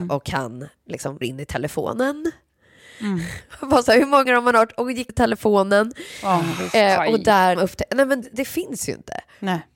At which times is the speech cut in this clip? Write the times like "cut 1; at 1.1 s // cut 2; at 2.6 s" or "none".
cut 1; at 1.2 s // cut 2; at 4.3 s // cut 3; at 5.1 s // cut 4; at 7.6 s // cut 5; at 8.2 s